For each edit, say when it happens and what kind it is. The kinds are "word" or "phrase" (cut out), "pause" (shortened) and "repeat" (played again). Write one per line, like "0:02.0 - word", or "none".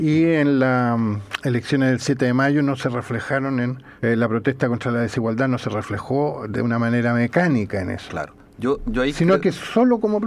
0:04.0 - pause